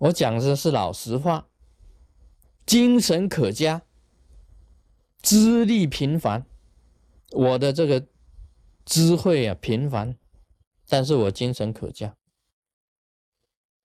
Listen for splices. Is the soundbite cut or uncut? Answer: uncut